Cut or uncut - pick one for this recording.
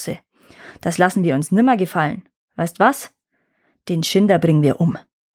uncut